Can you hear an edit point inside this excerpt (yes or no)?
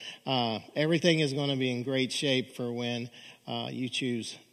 no